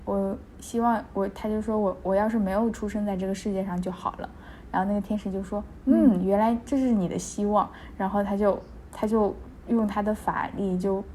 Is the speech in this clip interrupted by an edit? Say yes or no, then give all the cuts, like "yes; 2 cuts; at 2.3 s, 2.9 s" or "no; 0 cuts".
no; 0 cuts